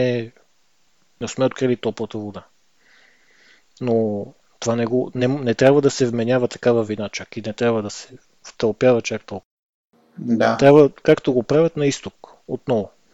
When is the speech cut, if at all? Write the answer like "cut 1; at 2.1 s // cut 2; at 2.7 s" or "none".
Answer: none